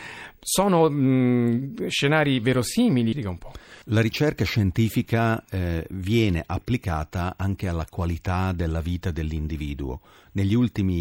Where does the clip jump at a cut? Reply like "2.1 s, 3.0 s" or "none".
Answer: 3.1 s, 3.8 s